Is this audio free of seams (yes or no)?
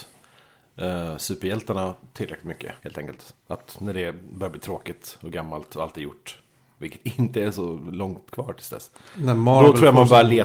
no